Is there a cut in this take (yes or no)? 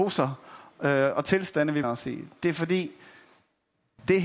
yes